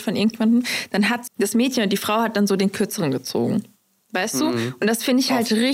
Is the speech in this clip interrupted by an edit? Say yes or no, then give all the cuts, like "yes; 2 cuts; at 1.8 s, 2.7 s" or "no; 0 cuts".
yes; 1 cut; at 1.3 s